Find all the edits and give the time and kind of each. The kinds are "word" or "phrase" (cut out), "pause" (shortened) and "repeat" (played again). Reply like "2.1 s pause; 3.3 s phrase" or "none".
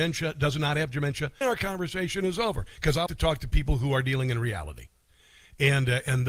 1.4 s word; 3.1 s word